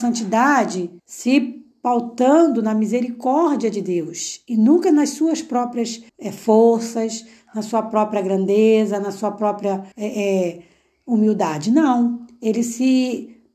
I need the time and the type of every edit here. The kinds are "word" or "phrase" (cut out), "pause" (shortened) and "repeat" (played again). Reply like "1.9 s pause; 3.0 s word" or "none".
1.0 s pause; 6.1 s pause; 9.9 s pause